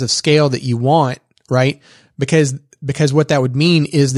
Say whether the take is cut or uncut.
uncut